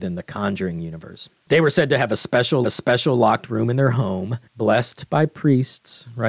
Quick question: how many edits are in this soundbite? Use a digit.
2